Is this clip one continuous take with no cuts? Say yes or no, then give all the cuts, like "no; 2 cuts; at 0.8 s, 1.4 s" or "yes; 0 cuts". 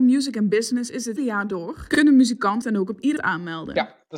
no; 3 cuts; at 1.2 s, 2.6 s, 3.2 s